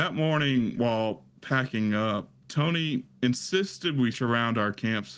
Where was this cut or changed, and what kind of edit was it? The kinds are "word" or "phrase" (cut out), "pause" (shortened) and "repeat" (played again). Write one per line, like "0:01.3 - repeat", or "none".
0:04.1 - word